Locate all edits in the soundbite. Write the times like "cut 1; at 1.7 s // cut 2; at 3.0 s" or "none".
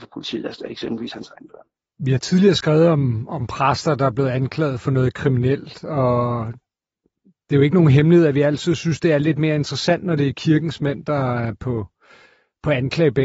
none